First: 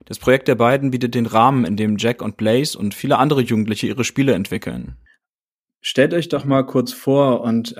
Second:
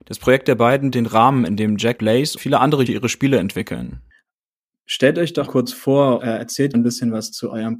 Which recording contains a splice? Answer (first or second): second